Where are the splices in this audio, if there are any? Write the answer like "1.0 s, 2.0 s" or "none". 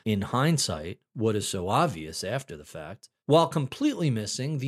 none